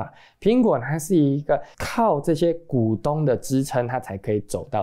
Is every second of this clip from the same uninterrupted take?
no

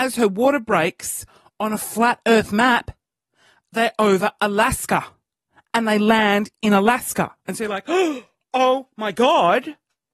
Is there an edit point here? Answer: no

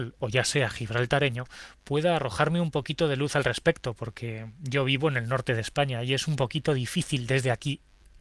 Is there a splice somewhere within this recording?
no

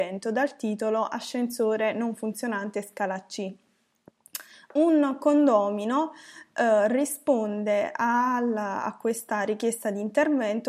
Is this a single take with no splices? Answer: yes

